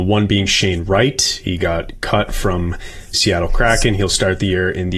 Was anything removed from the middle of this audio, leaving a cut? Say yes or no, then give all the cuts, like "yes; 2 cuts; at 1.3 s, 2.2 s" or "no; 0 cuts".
yes; 1 cut; at 3.1 s